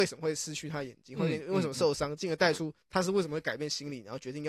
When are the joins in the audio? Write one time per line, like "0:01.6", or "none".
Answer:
0:02.8

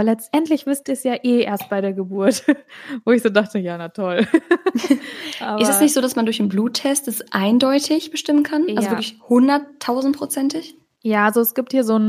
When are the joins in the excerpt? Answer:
none

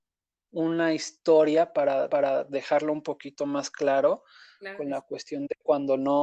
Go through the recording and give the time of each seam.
0:02.1

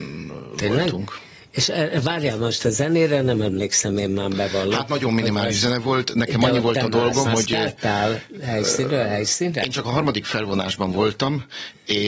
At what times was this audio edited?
0:07.3

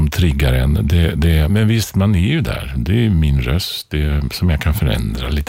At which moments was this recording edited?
0:01.5

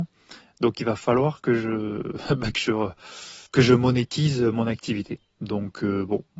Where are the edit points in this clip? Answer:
0:03.5

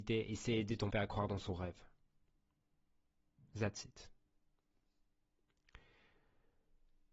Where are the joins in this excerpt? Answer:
0:00.9

